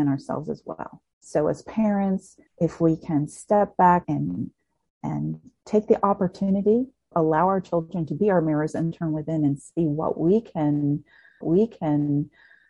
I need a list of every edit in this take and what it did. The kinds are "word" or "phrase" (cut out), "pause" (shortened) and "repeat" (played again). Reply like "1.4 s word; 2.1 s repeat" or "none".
2.5 s pause; 4.0 s word; 7.1 s word; 8.9 s word; 11.4 s repeat